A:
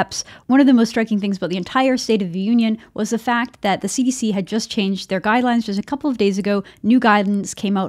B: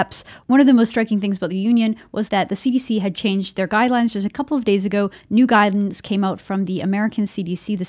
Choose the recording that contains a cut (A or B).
B